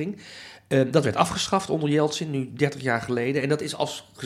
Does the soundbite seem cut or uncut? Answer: uncut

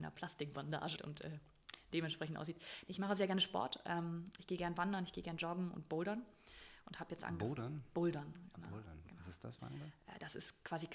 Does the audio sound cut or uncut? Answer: cut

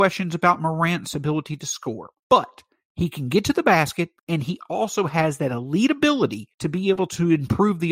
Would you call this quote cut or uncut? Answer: cut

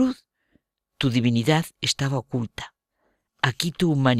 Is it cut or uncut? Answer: uncut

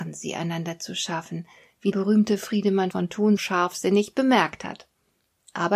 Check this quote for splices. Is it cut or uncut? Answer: cut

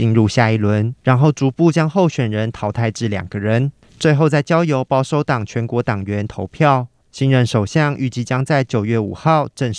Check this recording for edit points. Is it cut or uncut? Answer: cut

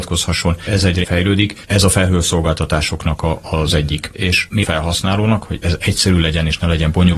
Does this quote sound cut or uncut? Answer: cut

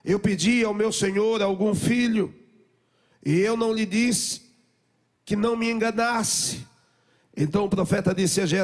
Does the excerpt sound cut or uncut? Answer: uncut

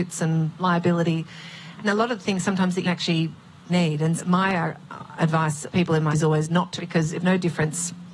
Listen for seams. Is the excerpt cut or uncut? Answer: cut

